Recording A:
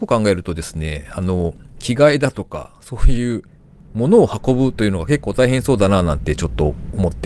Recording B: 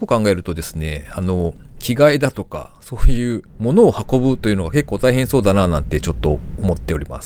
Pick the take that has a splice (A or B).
B